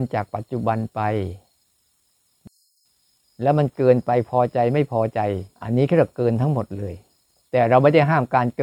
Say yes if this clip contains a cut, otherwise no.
yes